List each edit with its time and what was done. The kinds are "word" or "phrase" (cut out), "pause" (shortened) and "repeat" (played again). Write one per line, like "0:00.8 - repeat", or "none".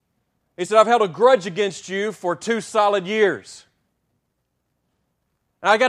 none